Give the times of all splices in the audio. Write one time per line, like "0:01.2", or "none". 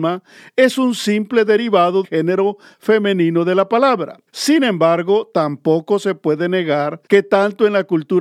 0:02.0
0:04.3
0:07.1